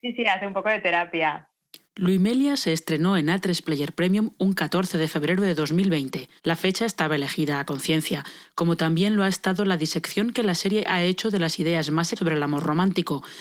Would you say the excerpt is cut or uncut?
cut